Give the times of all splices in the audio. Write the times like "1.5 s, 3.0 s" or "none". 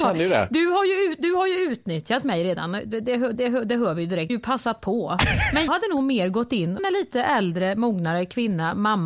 3.3 s, 4.3 s, 5.7 s, 6.8 s